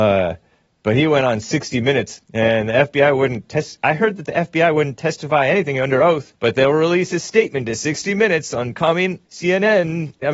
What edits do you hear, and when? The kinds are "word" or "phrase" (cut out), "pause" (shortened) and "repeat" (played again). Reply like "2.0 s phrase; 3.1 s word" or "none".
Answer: 2.2 s pause; 6.3 s pause; 9.3 s pause